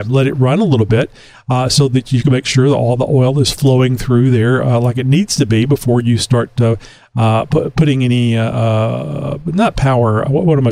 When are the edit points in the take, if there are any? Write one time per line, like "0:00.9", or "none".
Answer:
none

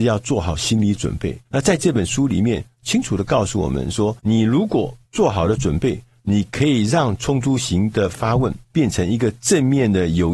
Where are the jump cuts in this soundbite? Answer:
0:01.5
0:04.2
0:05.0
0:08.6

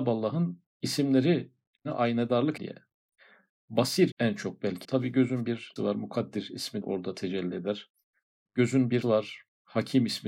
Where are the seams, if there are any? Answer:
0:02.6
0:04.1
0:04.8
0:05.8
0:06.8
0:09.0

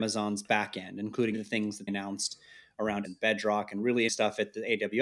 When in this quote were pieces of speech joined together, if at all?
0:01.3
0:01.9
0:03.0
0:04.1

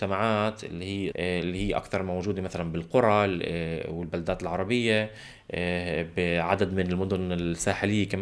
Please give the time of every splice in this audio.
0:01.1

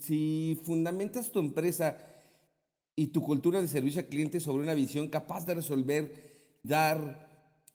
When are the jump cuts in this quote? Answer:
0:06.6

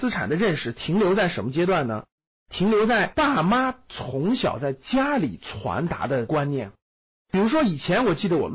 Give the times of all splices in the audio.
none

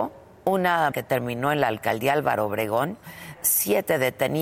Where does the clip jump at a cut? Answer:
0:00.9
0:03.3

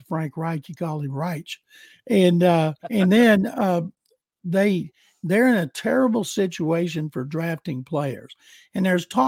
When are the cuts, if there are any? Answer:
0:02.8

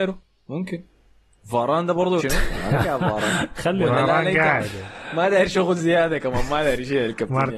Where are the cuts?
0:01.1
0:02.2

